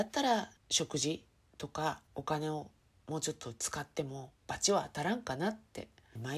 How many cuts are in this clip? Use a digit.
1